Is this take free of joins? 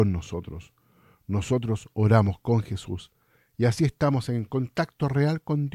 yes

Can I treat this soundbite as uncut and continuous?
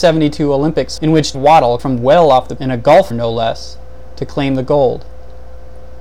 no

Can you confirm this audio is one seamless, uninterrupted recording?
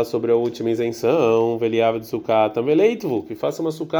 yes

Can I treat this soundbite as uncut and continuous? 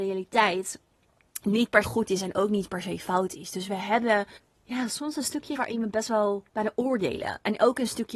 no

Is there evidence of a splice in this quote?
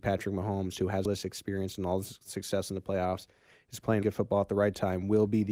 yes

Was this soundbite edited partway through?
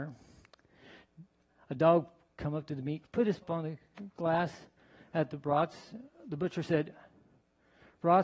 yes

